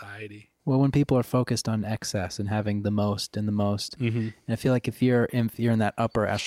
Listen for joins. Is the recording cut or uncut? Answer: uncut